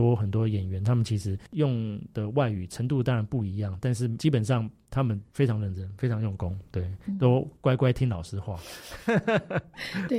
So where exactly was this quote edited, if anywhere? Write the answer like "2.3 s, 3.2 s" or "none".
1.5 s